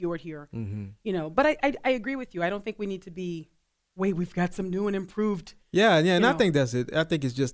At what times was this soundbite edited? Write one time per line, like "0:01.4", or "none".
none